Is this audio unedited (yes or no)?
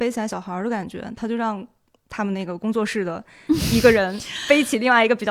yes